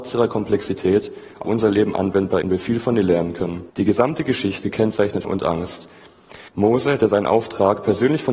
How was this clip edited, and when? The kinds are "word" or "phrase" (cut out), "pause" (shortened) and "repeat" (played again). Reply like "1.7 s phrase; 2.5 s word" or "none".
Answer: 1.4 s word; 2.4 s word; 3.7 s pause; 4.6 s word; 5.2 s phrase; 6.5 s pause